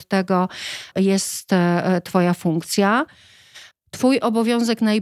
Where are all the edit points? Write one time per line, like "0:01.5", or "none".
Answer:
0:00.9
0:03.7